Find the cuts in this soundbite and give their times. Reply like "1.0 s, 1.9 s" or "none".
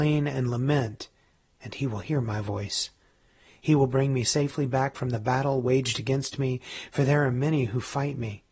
none